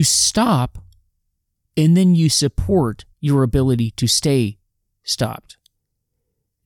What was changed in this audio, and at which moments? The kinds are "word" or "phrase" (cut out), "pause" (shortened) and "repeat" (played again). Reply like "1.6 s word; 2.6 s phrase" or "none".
3.1 s pause